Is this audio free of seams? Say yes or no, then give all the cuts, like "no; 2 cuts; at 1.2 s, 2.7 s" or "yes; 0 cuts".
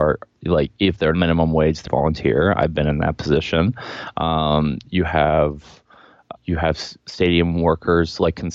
no; 3 cuts; at 1.1 s, 1.9 s, 6.3 s